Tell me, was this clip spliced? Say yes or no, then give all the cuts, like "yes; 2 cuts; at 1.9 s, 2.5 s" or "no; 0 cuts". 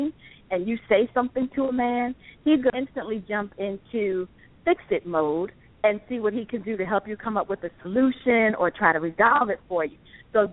yes; 1 cut; at 2.7 s